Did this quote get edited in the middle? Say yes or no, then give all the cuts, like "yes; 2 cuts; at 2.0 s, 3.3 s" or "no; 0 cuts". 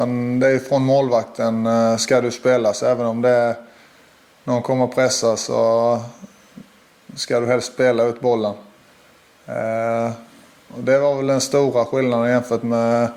no; 0 cuts